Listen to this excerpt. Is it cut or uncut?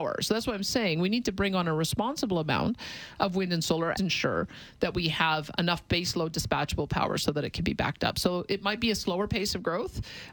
cut